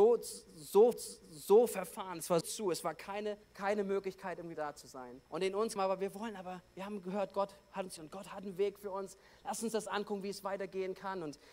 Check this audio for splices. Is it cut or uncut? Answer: cut